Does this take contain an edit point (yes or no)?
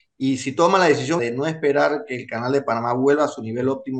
yes